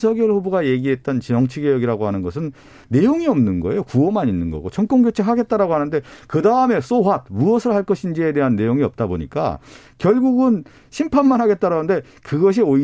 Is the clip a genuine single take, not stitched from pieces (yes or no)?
yes